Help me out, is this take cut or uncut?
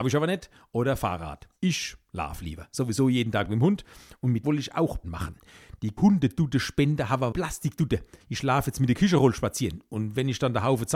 cut